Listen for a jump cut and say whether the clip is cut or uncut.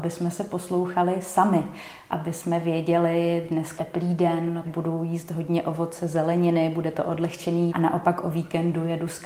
cut